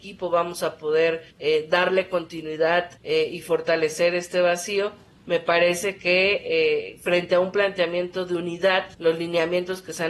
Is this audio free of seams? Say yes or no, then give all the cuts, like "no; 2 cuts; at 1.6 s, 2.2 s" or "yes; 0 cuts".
no; 3 cuts; at 1.3 s, 3.0 s, 8.9 s